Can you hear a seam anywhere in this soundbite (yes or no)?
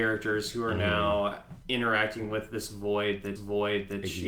yes